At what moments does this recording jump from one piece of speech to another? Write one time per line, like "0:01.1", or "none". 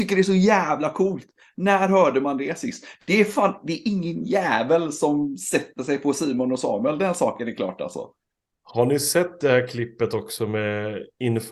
none